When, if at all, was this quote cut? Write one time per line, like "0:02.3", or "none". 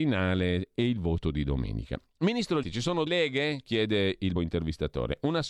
0:02.6
0:03.1
0:04.4